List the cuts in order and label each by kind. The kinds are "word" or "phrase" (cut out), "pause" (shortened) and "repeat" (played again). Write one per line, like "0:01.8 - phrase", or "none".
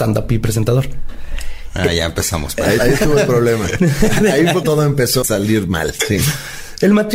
0:02.8 - word
0:04.6 - word
0:05.2 - word

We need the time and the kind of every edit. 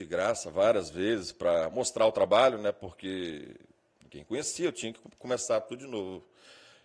none

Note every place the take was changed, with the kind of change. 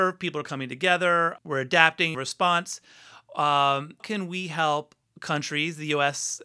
0:01.4 - word
0:02.1 - phrase
0:04.0 - word
0:05.0 - pause

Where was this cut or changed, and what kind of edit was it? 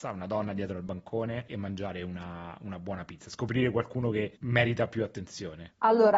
0:01.5 - word

